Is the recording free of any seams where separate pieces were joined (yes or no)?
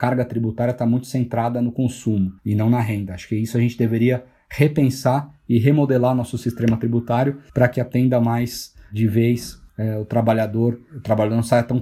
no